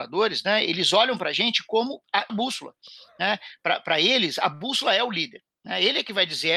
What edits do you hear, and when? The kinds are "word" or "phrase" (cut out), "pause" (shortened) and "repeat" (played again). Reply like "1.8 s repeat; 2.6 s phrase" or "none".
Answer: 2.3 s phrase